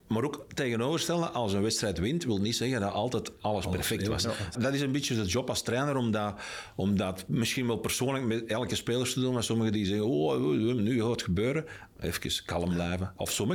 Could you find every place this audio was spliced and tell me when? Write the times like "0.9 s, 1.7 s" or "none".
4.5 s

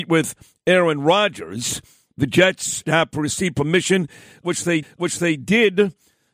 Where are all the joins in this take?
2.8 s, 4.8 s

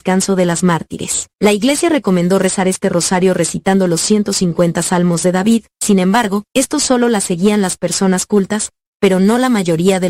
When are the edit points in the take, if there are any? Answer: 1.3 s, 5.7 s, 6.5 s

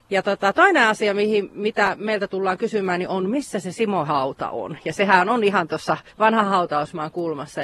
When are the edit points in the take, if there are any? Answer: 4.1 s, 6.1 s

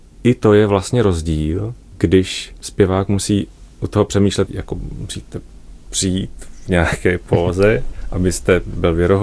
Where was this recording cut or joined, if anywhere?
4.5 s

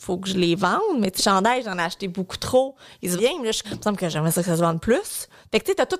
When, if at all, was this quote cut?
1.2 s, 3.2 s, 3.6 s

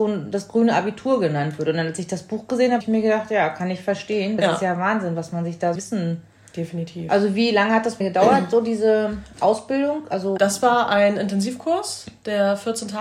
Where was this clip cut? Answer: 2.8 s, 4.4 s, 5.8 s, 8.0 s, 10.4 s

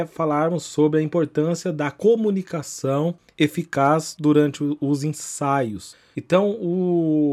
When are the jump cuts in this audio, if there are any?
none

